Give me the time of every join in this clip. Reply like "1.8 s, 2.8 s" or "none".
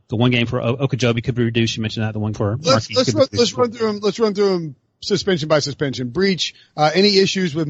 2.3 s